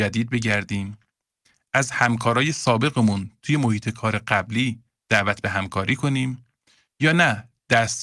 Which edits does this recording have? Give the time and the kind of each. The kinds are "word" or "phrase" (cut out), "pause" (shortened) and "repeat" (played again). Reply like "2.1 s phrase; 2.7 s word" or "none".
none

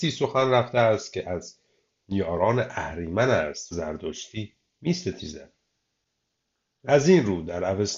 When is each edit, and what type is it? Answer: 3.7 s phrase

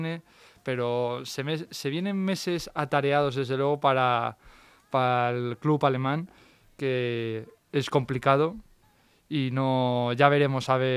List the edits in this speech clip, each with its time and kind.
none

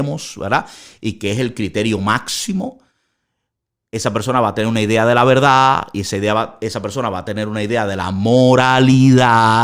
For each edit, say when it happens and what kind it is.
none

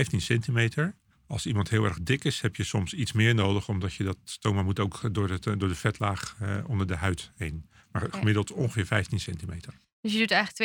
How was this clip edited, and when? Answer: 1.1 s pause

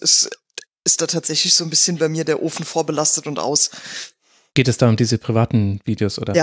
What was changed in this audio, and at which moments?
none

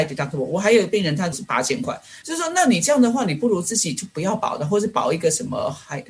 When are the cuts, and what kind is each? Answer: 1.3 s word; 2.2 s phrase

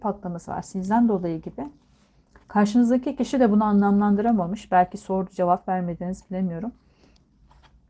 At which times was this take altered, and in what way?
none

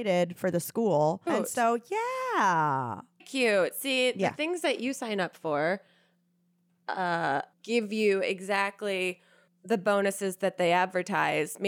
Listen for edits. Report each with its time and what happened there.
1.3 s word; 3.2 s word; 7.5 s pause; 9.5 s pause

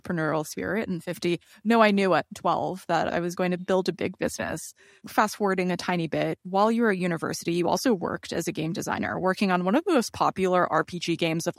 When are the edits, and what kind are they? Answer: none

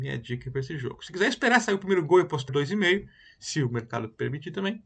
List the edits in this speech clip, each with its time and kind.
2.5 s word

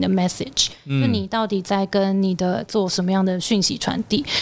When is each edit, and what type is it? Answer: 2.7 s word

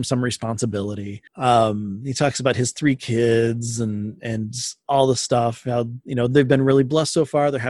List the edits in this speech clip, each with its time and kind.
1.3 s pause

